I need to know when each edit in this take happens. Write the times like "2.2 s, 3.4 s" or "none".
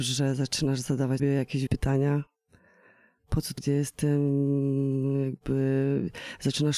1.2 s, 1.7 s, 3.6 s